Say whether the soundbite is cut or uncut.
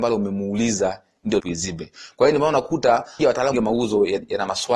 cut